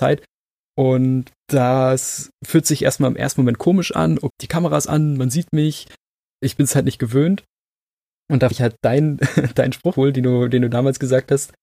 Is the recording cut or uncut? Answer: cut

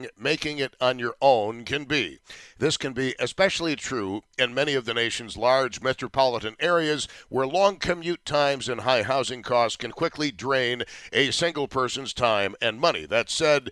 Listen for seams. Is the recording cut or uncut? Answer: uncut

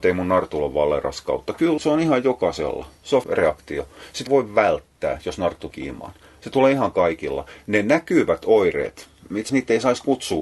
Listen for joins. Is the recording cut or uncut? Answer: cut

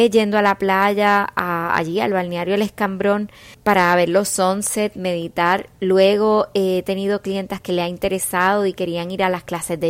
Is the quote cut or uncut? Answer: cut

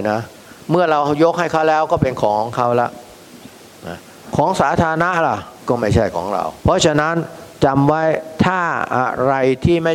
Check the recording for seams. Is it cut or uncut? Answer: cut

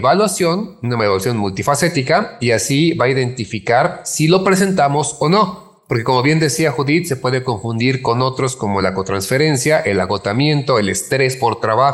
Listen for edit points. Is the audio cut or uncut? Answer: uncut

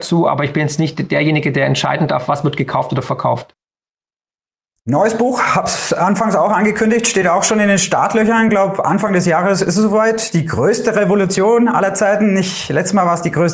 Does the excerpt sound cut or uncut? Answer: uncut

